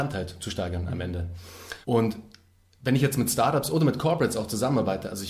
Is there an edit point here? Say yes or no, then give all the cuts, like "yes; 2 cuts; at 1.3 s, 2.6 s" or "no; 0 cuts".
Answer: yes; 1 cut; at 1.8 s